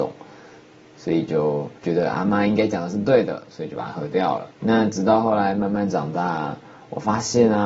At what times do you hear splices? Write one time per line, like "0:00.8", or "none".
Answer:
0:01.8
0:04.5